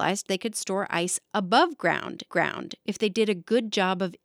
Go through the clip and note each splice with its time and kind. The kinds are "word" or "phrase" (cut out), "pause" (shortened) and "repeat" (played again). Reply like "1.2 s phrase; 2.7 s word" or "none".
2.3 s repeat